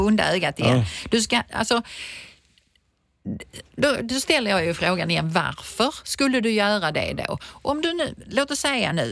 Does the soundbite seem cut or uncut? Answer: uncut